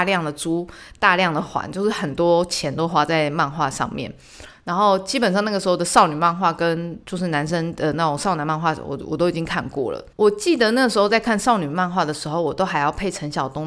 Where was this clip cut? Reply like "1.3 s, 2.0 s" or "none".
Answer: 7.0 s, 10.1 s

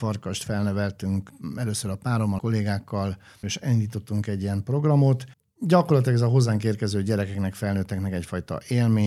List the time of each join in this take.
2.4 s, 5.3 s

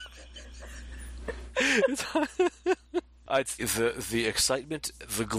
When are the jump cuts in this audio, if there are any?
3.6 s

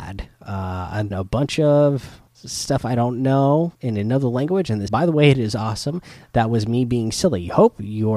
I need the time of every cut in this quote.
1.1 s, 2.3 s, 3.7 s, 4.9 s

